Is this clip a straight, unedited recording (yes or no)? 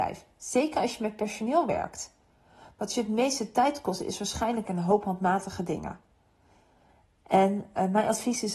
no